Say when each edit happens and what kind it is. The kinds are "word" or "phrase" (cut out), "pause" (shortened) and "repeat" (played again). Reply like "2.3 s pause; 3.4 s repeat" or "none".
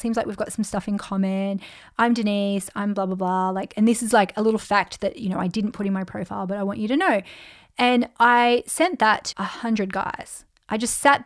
9.3 s word